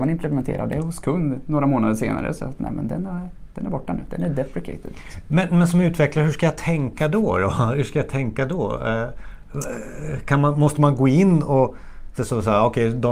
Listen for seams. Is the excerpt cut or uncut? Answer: cut